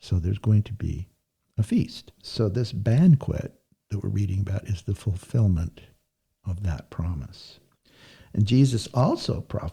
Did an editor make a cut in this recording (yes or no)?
no